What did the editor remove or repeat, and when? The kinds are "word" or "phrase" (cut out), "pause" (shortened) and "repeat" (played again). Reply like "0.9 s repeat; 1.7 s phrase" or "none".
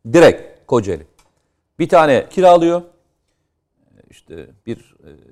2.3 s word